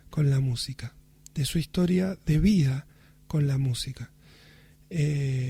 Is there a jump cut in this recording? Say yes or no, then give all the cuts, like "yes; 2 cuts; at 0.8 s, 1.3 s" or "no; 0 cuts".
no; 0 cuts